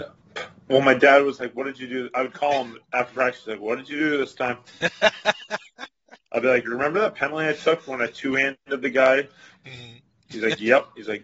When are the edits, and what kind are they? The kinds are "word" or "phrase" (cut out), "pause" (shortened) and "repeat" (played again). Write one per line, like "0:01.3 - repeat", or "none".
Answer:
0:02.8 - pause